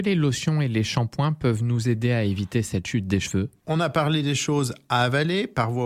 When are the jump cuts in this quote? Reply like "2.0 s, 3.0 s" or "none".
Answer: none